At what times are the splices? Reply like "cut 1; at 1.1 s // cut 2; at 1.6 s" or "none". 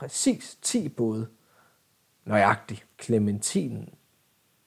cut 1; at 2.9 s